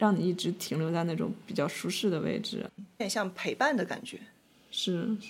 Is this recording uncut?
yes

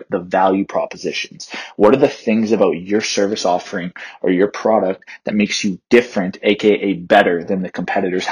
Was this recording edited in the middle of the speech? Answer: no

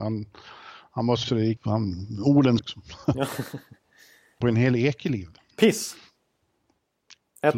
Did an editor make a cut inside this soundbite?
yes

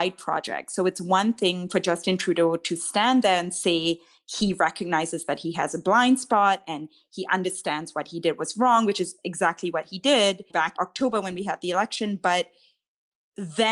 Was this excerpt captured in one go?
no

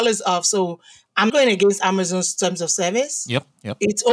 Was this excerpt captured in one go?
no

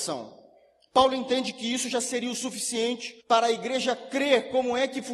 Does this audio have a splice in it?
yes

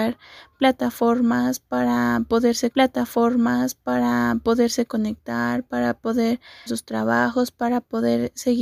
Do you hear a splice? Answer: yes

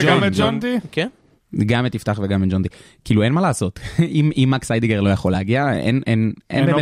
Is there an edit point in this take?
no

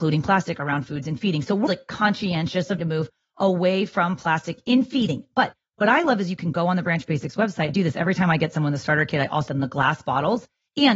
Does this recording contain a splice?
yes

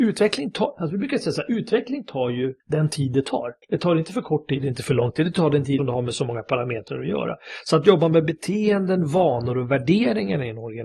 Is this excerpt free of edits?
no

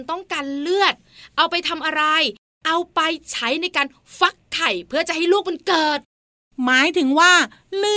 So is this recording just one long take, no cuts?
yes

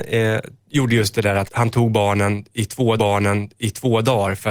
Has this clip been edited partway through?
yes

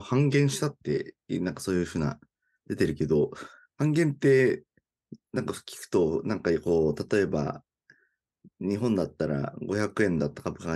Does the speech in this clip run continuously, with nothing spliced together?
yes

